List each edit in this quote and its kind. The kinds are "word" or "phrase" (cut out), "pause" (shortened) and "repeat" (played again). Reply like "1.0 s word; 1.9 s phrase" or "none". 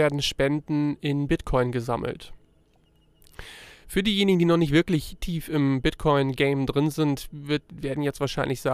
none